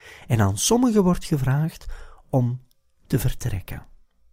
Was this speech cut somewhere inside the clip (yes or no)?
no